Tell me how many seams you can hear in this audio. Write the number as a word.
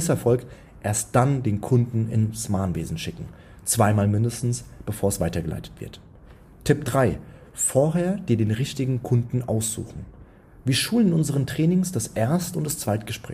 zero